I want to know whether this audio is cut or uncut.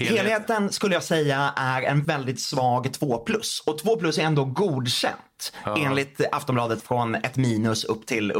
cut